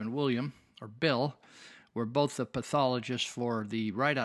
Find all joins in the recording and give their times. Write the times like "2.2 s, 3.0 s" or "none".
none